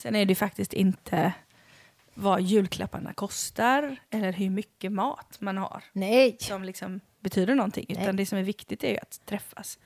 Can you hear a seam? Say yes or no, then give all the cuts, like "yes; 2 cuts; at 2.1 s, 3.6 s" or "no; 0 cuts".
no; 0 cuts